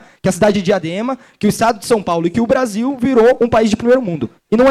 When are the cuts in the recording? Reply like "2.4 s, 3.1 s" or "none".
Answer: none